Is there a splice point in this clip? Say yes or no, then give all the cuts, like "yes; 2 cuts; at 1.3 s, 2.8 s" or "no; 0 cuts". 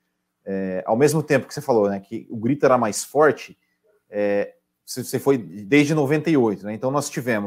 yes; 1 cut; at 4.7 s